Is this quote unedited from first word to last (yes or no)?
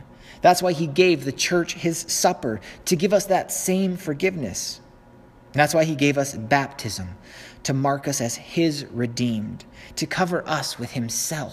yes